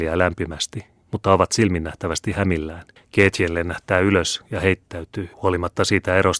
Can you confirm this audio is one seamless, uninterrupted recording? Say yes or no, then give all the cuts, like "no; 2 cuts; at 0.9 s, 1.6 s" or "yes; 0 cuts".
no; 2 cuts; at 3.0 s, 5.3 s